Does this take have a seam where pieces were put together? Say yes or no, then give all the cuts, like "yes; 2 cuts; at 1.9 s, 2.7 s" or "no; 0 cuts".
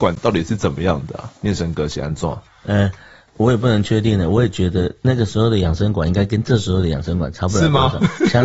yes; 1 cut; at 2.5 s